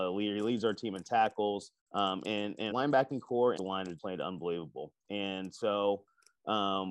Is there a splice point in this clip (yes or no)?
yes